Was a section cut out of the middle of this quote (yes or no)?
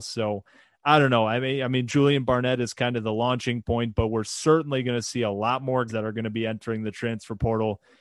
yes